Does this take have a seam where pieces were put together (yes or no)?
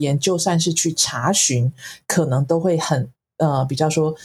no